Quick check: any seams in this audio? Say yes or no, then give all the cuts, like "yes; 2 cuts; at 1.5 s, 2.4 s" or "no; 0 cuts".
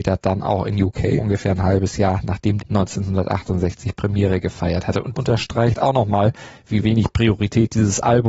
yes; 3 cuts; at 1.2 s, 2.6 s, 5.1 s